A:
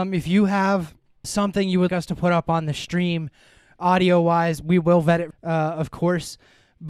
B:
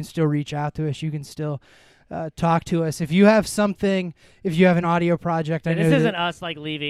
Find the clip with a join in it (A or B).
A